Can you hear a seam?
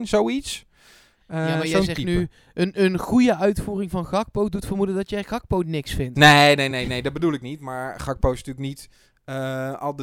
no; 0 cuts

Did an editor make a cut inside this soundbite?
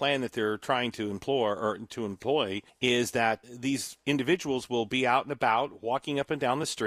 yes; 2 cuts; at 2.7 s, 3.4 s

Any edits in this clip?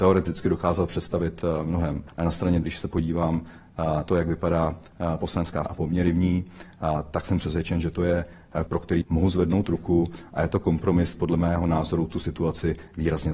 yes; 7 cuts; at 2.1 s, 2.6 s, 4.0 s, 5.7 s, 8.7 s, 9.0 s, 11.1 s

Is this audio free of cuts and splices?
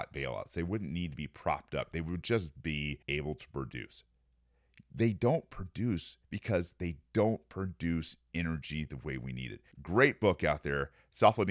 no; 3 cuts; at 3.0 s, 6.2 s, 9.7 s

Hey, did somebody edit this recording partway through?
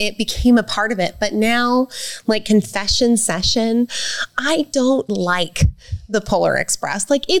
yes; 1 cut; at 5.1 s

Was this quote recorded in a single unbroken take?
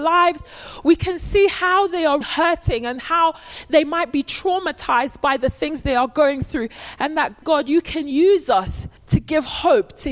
no; 3 cuts; at 2.2 s, 7.4 s, 9.0 s

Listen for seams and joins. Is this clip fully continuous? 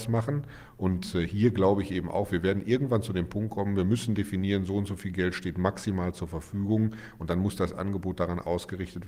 yes; 0 cuts

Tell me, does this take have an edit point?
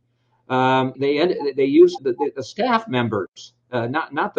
yes; 2 cuts; at 1.0 s, 2.0 s

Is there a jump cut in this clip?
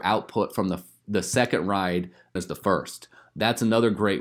yes; 1 cut; at 2.4 s

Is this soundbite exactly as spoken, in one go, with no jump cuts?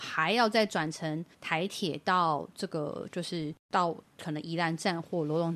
no; 2 cuts; at 1.3 s, 3.6 s

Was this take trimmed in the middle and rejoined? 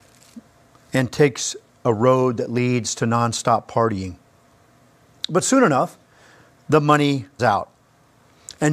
yes; 1 cut; at 7.4 s

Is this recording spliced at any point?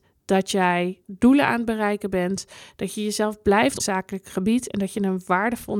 yes; 2 cuts; at 1.0 s, 3.8 s

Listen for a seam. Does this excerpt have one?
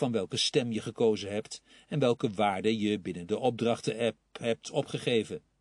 no; 0 cuts

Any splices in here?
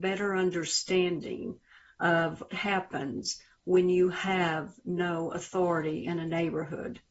yes; 1 cut; at 2.5 s

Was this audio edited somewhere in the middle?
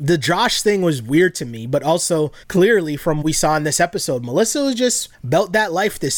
yes; 3 cuts; at 2.4 s, 3.2 s, 5.1 s

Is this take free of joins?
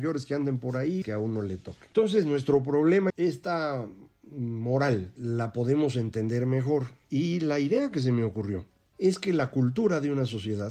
no; 3 cuts; at 1.0 s, 3.1 s, 5.2 s

